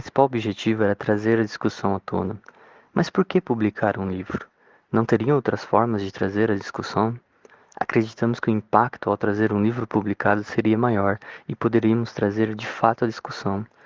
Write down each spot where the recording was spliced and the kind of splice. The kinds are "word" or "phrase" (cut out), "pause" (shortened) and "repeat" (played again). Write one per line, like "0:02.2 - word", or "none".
none

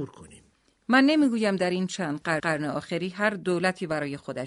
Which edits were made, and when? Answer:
0:02.4 - repeat

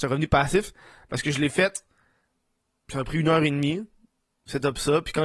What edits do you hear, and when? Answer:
none

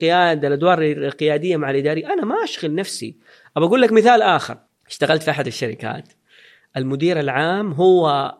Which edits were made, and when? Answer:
0:04.7 - pause

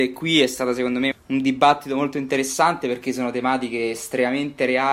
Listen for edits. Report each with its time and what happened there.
0:01.1 - word

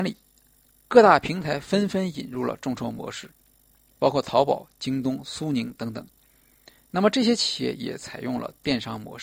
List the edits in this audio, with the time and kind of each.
none

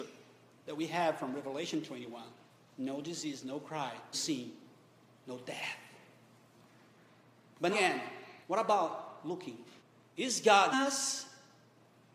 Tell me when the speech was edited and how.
0:04.1 - word
0:07.7 - word
0:08.4 - pause
0:09.8 - pause
0:10.7 - word

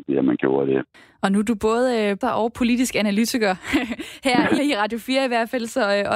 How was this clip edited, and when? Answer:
0:00.9 - pause
0:02.2 - word
0:04.6 - word

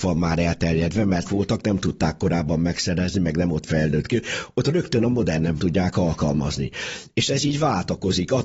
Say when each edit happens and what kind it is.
0:01.2 - word
0:05.6 - word

